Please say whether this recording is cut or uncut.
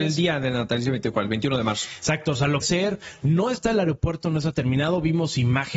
cut